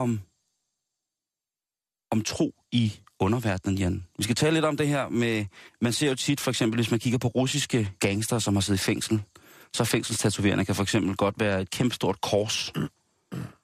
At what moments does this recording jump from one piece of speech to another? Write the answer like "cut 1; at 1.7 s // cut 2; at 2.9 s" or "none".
cut 1; at 5.7 s // cut 2; at 8.0 s